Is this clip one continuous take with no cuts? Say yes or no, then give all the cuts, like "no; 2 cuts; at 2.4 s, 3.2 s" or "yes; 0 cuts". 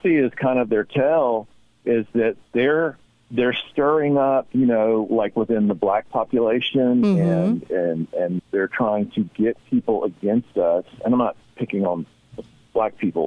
no; 2 cuts; at 3.1 s, 8.4 s